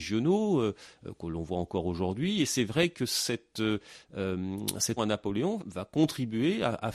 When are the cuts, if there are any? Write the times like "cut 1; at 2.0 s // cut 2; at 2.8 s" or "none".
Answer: cut 1; at 5.0 s // cut 2; at 5.6 s